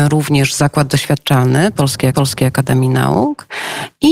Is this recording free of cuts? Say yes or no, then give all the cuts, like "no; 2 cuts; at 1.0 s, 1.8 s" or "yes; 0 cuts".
no; 1 cut; at 2.1 s